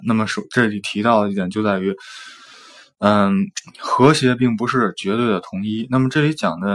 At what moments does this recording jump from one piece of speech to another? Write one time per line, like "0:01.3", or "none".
none